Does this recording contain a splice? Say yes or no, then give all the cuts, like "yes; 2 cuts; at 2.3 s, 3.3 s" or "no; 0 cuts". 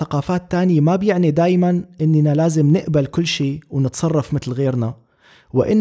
no; 0 cuts